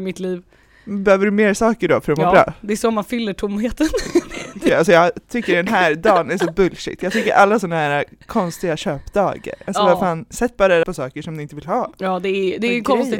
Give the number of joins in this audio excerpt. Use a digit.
1